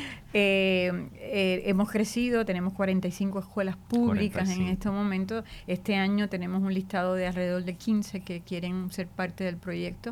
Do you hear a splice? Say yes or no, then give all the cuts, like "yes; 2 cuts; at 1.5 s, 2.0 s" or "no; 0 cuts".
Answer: no; 0 cuts